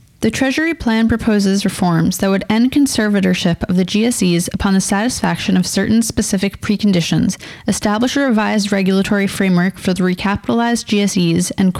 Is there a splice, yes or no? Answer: no